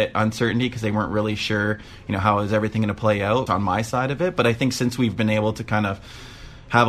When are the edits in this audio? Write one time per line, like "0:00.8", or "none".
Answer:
0:03.5